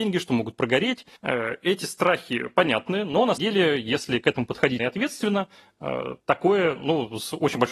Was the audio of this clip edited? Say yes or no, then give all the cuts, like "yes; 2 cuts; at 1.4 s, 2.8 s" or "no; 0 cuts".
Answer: yes; 4 cuts; at 1.2 s, 3.4 s, 4.8 s, 6.2 s